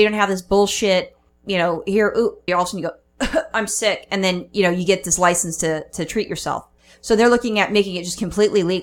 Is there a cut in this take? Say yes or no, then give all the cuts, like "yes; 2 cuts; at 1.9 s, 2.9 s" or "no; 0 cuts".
yes; 1 cut; at 2.5 s